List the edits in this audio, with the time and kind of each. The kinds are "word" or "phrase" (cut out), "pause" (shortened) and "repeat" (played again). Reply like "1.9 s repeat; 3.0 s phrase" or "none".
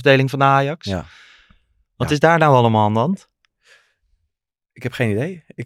none